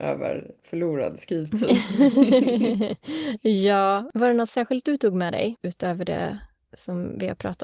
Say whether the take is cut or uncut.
uncut